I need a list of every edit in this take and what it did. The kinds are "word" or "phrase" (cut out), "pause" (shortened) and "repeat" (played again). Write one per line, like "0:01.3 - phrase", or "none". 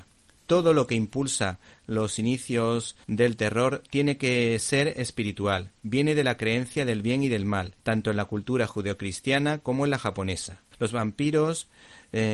0:03.0 - pause
0:07.8 - pause
0:10.7 - pause